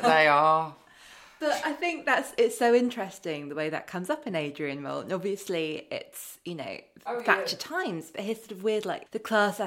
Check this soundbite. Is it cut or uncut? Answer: uncut